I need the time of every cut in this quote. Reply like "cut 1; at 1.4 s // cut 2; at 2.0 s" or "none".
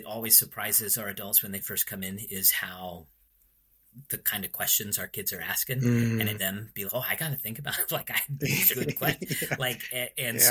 cut 1; at 6.4 s // cut 2; at 6.9 s // cut 3; at 8.7 s